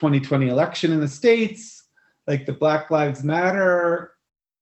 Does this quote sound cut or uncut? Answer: uncut